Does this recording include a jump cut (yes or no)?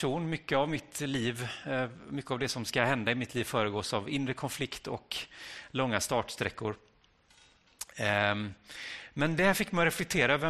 no